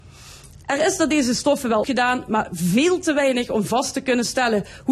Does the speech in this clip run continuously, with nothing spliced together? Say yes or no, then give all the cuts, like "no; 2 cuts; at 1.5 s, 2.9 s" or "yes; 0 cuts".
no; 1 cut; at 1.8 s